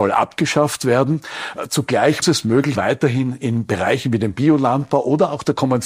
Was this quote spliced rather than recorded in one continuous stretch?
yes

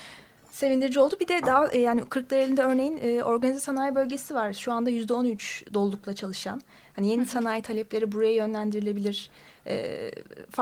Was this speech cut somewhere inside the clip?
no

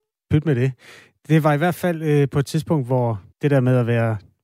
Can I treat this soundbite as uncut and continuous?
no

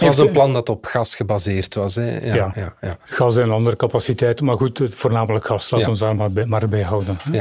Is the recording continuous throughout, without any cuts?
no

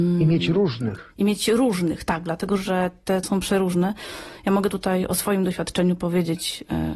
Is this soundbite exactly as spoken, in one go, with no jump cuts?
no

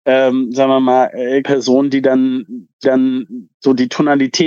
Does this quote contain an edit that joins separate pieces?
yes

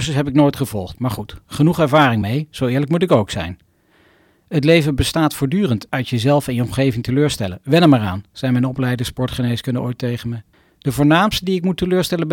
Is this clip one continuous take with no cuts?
yes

